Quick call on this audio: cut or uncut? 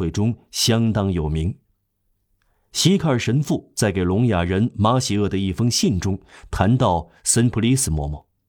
uncut